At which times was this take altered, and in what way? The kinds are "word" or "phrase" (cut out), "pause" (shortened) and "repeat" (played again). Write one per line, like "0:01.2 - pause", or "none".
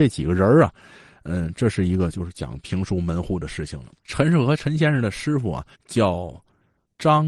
0:04.0 - pause
0:05.7 - pause